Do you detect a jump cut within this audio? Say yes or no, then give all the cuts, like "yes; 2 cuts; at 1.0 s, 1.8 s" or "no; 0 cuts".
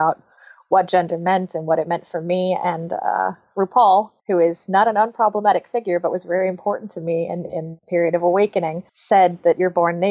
yes; 2 cuts; at 4.2 s, 8.9 s